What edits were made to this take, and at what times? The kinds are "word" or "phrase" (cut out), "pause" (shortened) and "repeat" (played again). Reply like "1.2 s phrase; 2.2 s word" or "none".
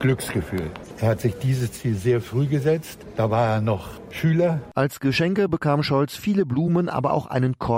none